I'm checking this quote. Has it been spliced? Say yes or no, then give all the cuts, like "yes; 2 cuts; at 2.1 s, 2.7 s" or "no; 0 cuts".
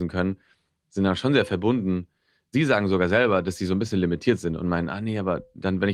no; 0 cuts